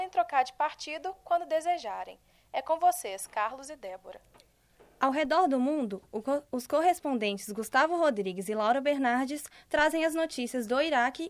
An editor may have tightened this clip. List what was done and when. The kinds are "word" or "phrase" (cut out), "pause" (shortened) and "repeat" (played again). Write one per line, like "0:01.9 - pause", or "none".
none